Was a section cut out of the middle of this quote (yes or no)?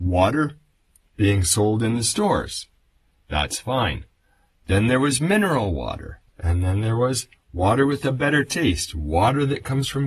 yes